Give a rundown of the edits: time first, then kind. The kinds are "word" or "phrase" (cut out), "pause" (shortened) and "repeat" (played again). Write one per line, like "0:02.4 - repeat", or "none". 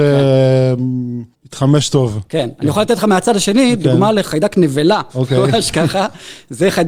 0:01.3 - pause
0:05.1 - pause

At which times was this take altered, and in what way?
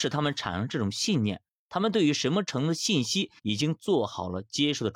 0:03.4 - pause

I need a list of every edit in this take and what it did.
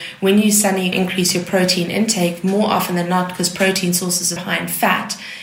0:00.9 - phrase
0:04.4 - word

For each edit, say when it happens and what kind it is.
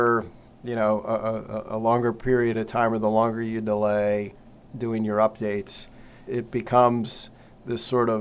0:06.3 - word

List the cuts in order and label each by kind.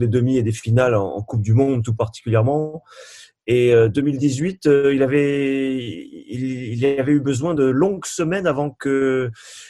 none

